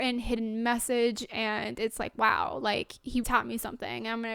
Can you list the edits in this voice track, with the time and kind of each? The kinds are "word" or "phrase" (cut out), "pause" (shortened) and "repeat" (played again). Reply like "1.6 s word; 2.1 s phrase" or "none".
3.2 s word